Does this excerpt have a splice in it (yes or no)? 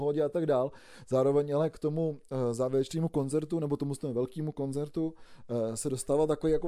no